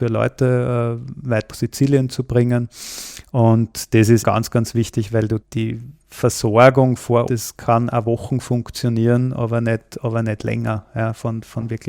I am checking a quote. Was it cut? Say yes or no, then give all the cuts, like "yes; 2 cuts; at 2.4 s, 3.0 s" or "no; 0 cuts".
yes; 4 cuts; at 1.5 s, 4.2 s, 5.4 s, 7.3 s